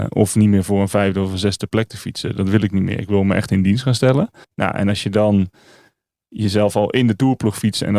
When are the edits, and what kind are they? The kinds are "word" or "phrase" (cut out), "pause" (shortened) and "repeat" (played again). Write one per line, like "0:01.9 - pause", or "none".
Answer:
0:04.4 - pause